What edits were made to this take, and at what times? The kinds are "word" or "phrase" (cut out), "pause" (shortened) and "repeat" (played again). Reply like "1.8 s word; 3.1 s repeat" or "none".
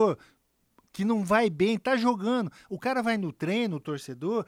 none

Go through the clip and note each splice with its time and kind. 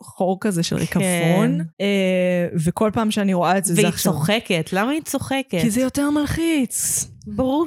1.7 s pause

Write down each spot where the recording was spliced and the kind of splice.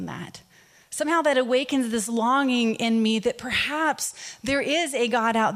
none

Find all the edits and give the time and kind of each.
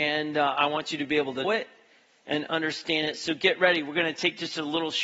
1.4 s word

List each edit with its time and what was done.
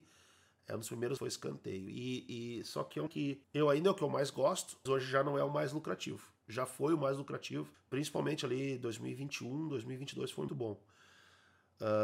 1.2 s word; 3.1 s word; 3.4 s pause; 4.9 s word; 6.4 s pause; 7.7 s pause; 10.5 s word

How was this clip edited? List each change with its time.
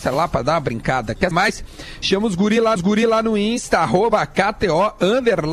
1.3 s word; 2.8 s repeat

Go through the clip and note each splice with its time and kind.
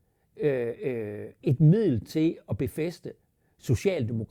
none

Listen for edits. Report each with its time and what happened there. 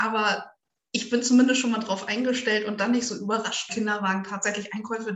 3.7 s phrase

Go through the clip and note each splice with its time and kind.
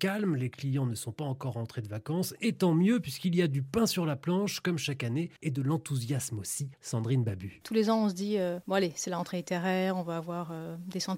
5.4 s pause; 6.7 s pause

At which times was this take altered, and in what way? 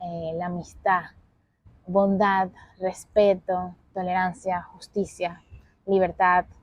none

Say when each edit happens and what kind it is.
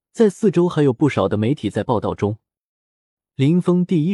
none

